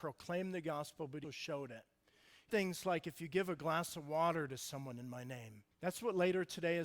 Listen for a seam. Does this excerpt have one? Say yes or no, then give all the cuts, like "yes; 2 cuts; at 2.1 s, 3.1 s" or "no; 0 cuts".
yes; 3 cuts; at 1.2 s, 2.5 s, 5.7 s